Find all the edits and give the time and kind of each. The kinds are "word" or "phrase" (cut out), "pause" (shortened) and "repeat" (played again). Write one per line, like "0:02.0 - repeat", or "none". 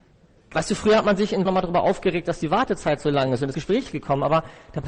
0:01.5 - phrase
0:03.5 - word